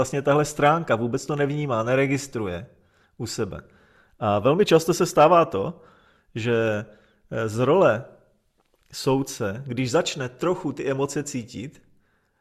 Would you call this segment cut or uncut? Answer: uncut